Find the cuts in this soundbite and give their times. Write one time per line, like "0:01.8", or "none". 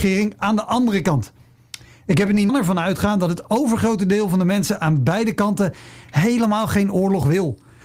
0:02.5

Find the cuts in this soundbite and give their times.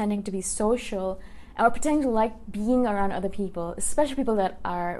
none

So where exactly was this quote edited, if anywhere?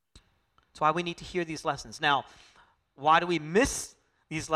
none

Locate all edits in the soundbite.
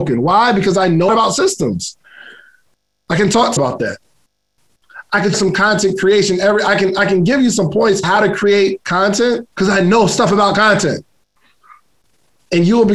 0:01.1
0:03.6
0:05.3
0:08.0
0:09.5

